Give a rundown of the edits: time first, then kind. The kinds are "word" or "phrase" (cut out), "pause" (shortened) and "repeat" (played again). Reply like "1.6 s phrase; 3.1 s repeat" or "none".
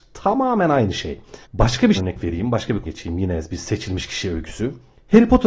1.4 s pause; 2.0 s word; 2.8 s word